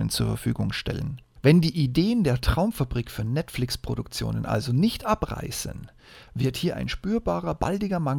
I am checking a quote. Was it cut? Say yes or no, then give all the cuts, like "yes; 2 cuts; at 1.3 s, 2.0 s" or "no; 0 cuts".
no; 0 cuts